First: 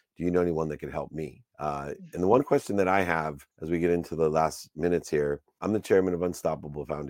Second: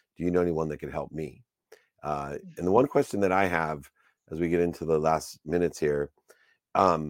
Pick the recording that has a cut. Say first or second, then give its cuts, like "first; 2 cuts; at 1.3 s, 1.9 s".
first; 3 cuts; at 1.5 s, 3.5 s, 5.6 s